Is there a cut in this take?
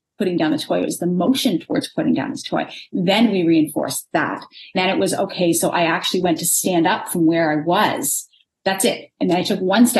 yes; 1 cut; at 4.7 s

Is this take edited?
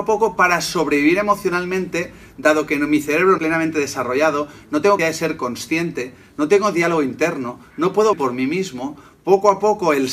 yes; 3 cuts; at 3.4 s, 5.0 s, 8.1 s

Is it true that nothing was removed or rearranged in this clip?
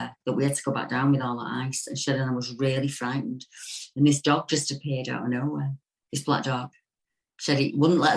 yes; 0 cuts

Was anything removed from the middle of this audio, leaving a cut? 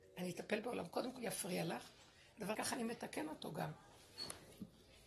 yes; 2 cuts; at 1.2 s, 2.5 s

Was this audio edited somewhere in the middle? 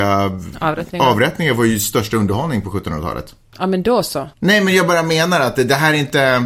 yes; 1 cut; at 4.3 s

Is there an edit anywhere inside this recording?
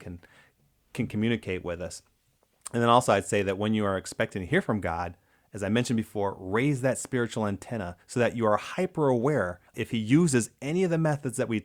yes; 2 cuts; at 8.0 s, 9.7 s

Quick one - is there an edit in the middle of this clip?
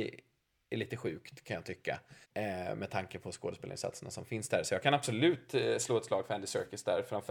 yes; 1 cut; at 2.2 s

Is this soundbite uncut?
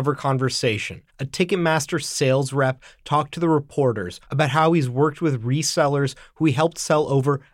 no; 2 cuts; at 1.1 s, 4.2 s

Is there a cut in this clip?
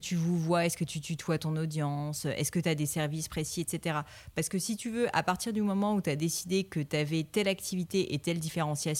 no; 0 cuts

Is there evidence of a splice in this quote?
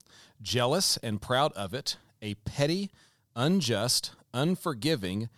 no; 0 cuts

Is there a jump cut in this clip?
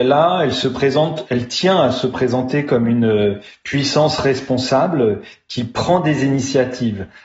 no; 0 cuts

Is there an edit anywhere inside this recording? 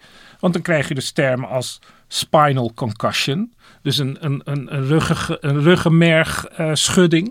no; 0 cuts

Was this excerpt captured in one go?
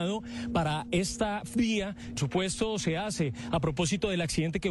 no; 1 cut; at 2.2 s

